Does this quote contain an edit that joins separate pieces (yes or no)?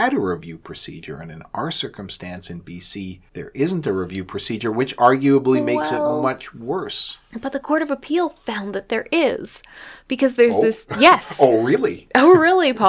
yes